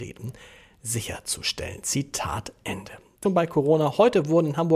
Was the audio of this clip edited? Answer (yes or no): yes